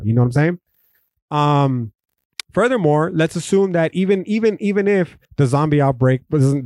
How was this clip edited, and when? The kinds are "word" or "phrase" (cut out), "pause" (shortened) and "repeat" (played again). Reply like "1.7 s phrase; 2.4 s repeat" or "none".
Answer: 2.3 s pause; 5.2 s pause